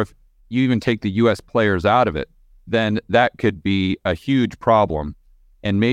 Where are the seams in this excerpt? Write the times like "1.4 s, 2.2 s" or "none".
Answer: none